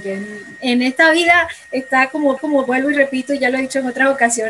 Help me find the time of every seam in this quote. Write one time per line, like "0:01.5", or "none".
0:02.4

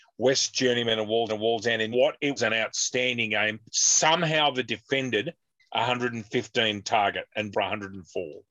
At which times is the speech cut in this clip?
0:01.3
0:01.9
0:02.4
0:03.7
0:04.7
0:05.6
0:07.5

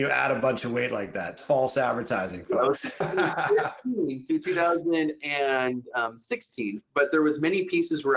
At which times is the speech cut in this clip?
0:01.4
0:03.0

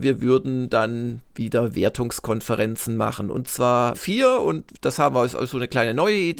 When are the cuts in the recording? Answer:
0:01.3
0:03.9

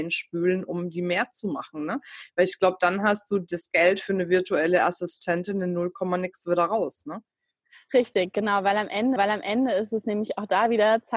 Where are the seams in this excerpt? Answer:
0:09.2

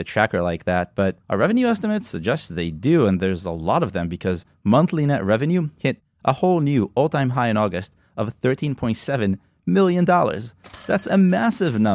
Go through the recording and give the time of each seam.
0:01.2

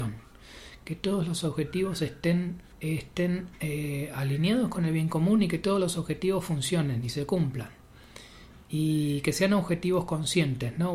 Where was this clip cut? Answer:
0:02.7

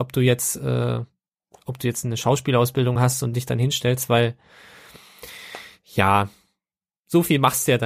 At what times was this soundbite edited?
none

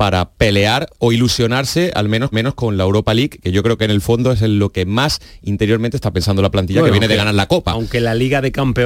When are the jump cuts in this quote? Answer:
0:00.9
0:02.3

